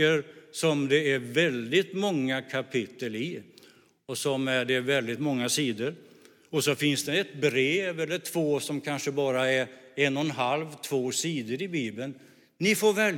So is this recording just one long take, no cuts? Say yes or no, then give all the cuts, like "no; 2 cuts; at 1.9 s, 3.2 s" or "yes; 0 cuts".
yes; 0 cuts